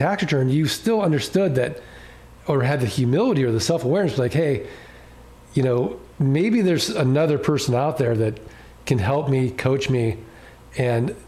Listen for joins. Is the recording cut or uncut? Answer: cut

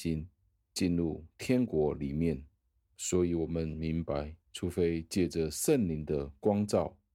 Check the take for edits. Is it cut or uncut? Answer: cut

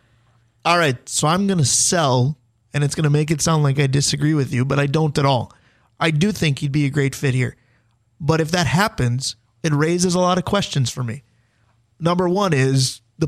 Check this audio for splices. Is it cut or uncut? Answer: uncut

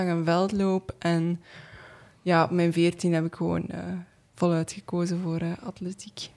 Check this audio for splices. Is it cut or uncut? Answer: uncut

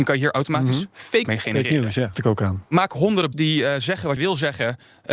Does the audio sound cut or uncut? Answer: cut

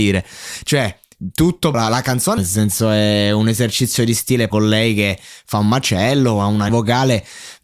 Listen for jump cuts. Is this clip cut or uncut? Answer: cut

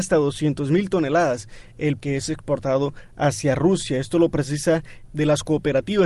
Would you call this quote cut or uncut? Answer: cut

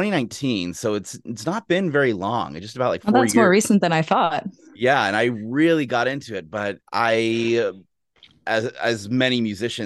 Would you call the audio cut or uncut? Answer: cut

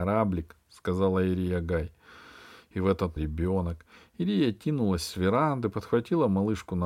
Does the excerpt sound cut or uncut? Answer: cut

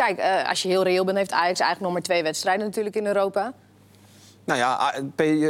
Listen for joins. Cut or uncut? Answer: uncut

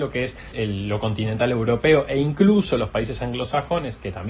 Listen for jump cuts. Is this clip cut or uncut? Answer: uncut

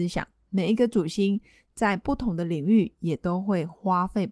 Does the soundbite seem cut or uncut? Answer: uncut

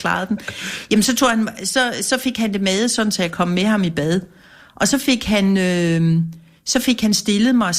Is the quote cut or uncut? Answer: uncut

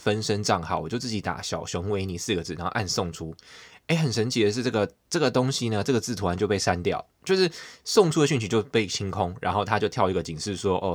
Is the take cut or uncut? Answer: uncut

